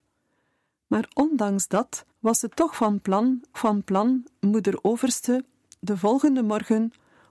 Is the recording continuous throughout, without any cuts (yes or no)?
no